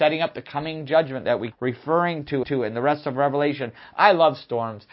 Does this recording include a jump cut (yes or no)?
yes